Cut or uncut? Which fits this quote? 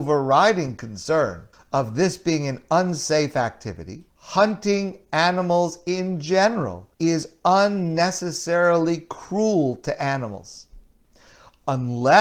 cut